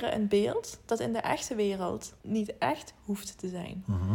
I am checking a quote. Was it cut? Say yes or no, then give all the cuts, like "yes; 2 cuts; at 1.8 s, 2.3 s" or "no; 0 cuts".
yes; 1 cut; at 2.2 s